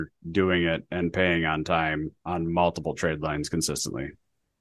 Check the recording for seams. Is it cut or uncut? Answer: uncut